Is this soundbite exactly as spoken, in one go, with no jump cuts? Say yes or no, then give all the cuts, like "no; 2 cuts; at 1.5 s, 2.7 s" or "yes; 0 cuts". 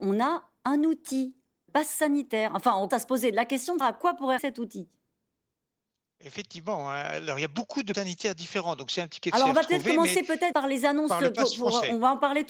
no; 7 cuts; at 1.7 s, 2.9 s, 3.8 s, 4.4 s, 7.9 s, 9.2 s, 10.5 s